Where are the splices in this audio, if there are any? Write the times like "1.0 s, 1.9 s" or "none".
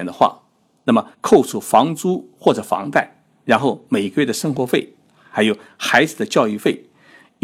1.1 s